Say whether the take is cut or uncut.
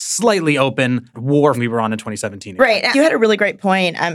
cut